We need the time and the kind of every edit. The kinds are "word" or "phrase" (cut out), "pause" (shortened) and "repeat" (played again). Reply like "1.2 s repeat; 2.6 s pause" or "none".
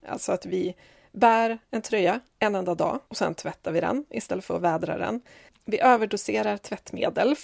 3.1 s pause